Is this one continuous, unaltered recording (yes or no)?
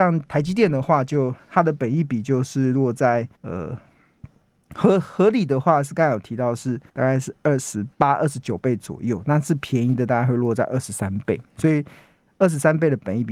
no